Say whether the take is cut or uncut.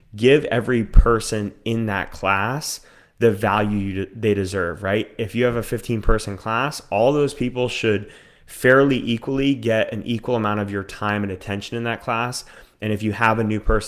uncut